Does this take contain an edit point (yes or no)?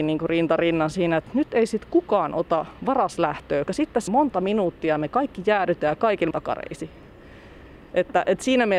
yes